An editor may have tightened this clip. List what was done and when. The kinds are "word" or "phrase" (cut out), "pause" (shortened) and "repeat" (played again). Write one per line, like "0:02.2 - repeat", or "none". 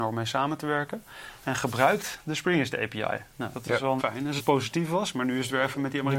0:01.4 - phrase
0:03.5 - word
0:04.0 - word
0:04.4 - phrase